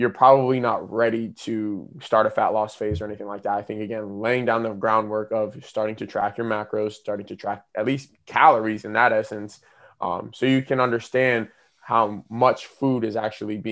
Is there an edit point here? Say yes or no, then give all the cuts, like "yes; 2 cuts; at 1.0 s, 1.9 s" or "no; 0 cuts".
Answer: no; 0 cuts